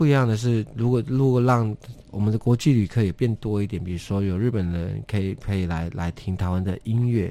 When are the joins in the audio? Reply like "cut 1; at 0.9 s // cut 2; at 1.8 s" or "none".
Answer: cut 1; at 2.1 s